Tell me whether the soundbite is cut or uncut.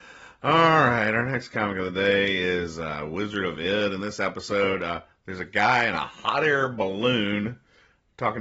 uncut